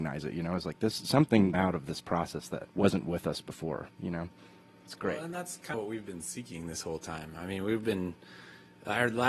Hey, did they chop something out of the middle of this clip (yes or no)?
yes